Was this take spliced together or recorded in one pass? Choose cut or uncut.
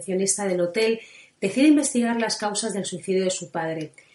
uncut